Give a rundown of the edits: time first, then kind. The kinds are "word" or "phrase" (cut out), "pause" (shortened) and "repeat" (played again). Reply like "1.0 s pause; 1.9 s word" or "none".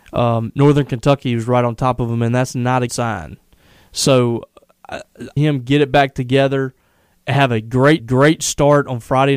2.9 s word; 5.4 s phrase; 8.0 s repeat